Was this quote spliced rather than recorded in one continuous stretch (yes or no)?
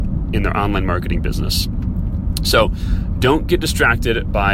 no